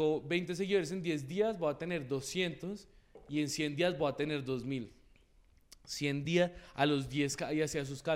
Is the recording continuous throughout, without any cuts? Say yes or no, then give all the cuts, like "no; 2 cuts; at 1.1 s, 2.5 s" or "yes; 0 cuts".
yes; 0 cuts